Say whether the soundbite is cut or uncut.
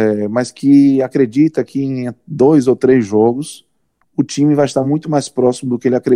uncut